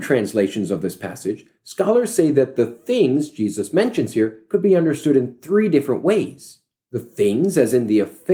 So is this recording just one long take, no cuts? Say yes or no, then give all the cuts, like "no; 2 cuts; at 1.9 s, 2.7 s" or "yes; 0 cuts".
yes; 0 cuts